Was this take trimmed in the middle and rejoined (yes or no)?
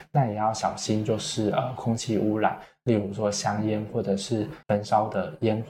yes